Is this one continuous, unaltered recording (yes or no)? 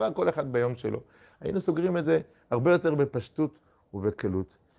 yes